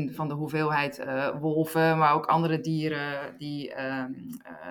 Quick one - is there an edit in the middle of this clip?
no; 0 cuts

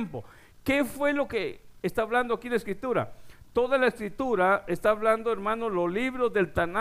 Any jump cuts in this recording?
no; 0 cuts

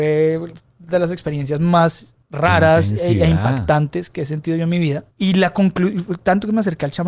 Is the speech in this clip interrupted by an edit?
yes; 2 cuts; at 2.2 s, 5.1 s

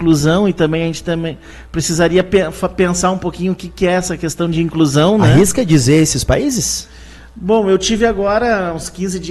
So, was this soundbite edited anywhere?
no; 0 cuts

